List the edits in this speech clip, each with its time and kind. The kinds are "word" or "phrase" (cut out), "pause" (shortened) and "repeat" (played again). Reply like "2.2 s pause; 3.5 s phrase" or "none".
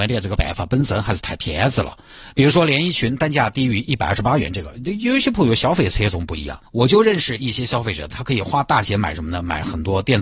6.7 s pause